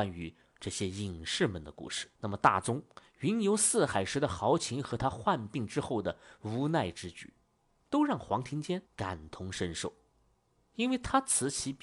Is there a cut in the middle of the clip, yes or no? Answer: yes